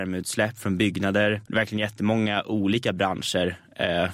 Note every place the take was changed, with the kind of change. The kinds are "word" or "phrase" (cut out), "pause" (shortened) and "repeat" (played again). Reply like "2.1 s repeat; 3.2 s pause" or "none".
1.5 s pause